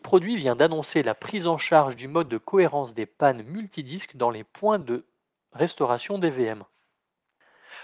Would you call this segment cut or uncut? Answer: uncut